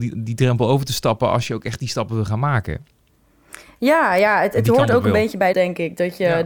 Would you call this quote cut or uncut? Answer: cut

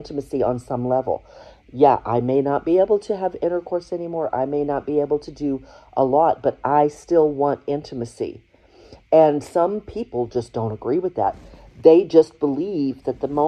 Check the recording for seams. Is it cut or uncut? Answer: uncut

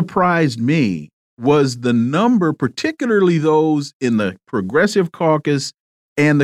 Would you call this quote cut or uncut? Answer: uncut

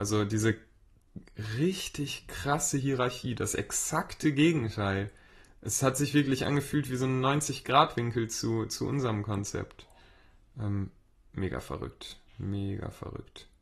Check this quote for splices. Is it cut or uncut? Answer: uncut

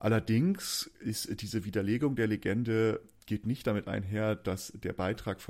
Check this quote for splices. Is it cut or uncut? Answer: uncut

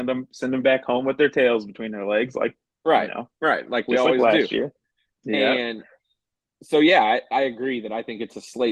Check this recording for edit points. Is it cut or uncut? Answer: uncut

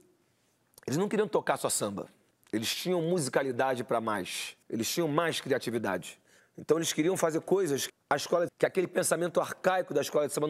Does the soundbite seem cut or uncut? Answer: cut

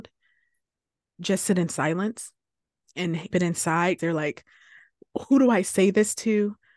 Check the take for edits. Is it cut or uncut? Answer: cut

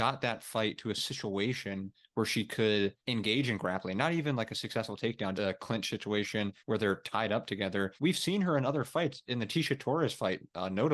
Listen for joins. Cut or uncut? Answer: cut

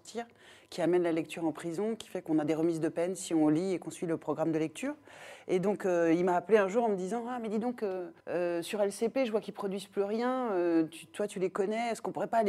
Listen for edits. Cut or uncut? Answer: cut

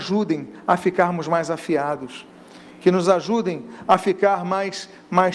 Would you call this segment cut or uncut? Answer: uncut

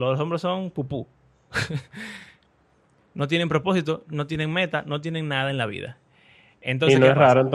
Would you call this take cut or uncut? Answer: uncut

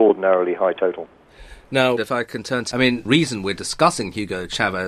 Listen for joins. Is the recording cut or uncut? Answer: cut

